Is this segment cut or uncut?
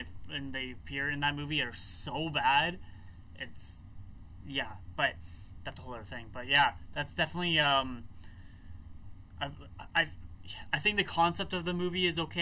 uncut